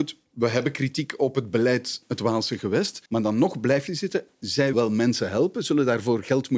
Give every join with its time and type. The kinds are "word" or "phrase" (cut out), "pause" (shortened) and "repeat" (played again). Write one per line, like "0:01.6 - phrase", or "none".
0:02.0 - word
0:03.1 - pause
0:03.9 - phrase
0:04.7 - word